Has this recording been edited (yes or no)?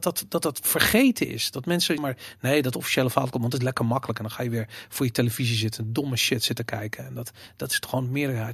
yes